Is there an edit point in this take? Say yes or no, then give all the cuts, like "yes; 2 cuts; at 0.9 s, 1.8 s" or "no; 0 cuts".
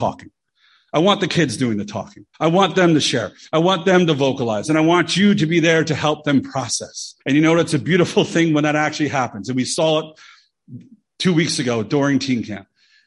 yes; 2 cuts; at 2.3 s, 7.2 s